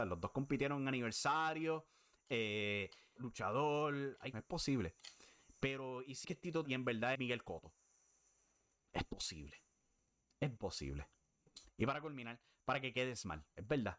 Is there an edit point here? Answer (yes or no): yes